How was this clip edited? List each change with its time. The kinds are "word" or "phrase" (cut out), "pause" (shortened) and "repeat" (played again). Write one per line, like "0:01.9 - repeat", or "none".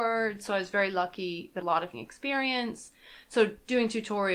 0:01.6 - phrase
0:01.9 - word